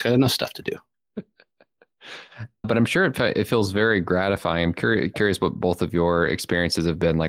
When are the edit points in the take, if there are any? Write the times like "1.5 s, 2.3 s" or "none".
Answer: 2.6 s